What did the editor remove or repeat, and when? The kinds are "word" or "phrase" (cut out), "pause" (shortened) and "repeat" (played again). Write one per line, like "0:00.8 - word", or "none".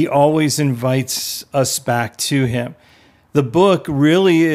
none